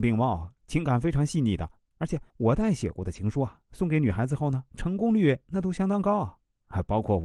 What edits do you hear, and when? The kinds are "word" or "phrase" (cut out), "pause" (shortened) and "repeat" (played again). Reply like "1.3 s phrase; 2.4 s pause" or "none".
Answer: 2.3 s pause